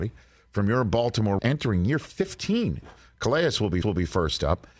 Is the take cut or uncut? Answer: cut